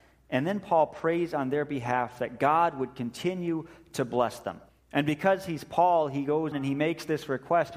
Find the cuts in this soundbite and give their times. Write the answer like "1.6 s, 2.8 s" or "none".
4.7 s, 6.5 s